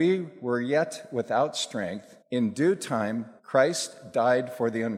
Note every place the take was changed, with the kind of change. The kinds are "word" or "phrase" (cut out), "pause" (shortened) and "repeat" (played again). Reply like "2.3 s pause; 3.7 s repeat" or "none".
2.2 s pause; 3.4 s pause